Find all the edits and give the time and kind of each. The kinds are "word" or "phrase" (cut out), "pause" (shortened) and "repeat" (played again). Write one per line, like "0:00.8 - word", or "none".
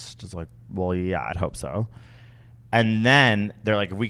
0:01.3 - word